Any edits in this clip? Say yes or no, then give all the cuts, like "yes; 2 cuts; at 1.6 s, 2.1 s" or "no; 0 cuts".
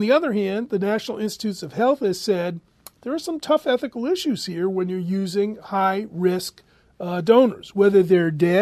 no; 0 cuts